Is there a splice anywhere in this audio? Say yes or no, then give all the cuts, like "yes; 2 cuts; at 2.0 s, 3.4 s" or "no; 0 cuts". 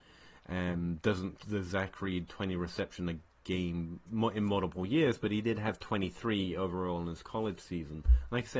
yes; 1 cut; at 1.4 s